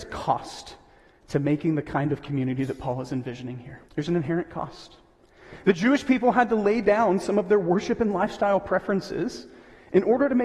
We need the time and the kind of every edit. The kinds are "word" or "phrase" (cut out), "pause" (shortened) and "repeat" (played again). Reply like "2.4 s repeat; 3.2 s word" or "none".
3.9 s pause